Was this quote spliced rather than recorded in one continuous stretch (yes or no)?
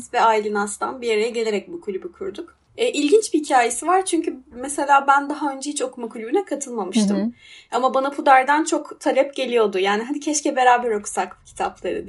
no